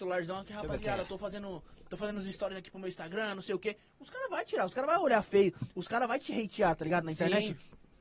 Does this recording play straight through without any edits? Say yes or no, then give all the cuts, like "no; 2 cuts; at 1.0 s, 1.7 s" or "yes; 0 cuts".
yes; 0 cuts